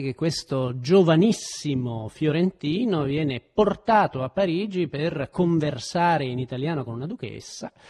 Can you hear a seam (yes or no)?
no